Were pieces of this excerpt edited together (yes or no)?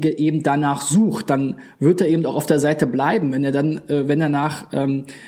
no